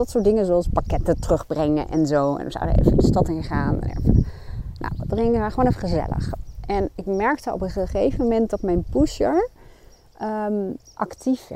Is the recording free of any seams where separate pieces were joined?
yes; 0 cuts

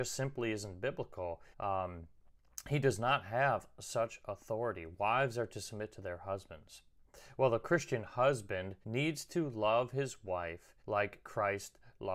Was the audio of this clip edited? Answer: yes; 3 cuts; at 1.5 s, 8.8 s, 10.8 s

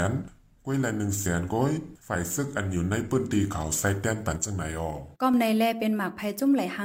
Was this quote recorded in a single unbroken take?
no; 2 cuts; at 2.0 s, 5.2 s

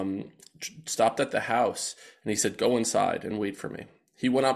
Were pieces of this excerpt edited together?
no; 0 cuts

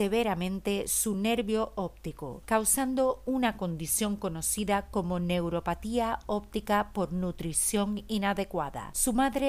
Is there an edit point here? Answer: no; 0 cuts

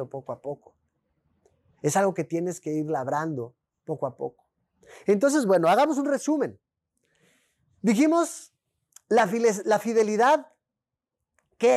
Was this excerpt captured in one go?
yes; 0 cuts

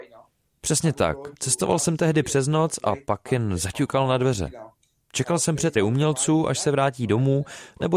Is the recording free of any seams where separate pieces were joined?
no; 1 cut; at 5.8 s

